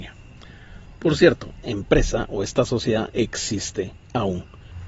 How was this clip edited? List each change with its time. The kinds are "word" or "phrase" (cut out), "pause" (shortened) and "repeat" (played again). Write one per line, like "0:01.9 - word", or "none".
0:01.6 - word